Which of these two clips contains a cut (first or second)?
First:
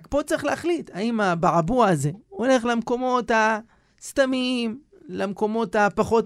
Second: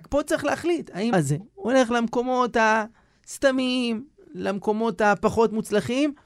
second